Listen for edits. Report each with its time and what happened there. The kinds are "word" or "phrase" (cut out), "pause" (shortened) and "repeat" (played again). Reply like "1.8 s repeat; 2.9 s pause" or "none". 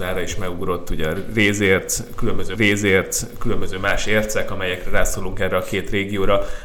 2.6 s repeat